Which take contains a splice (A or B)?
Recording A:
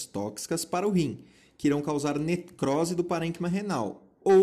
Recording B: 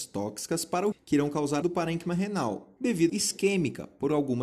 B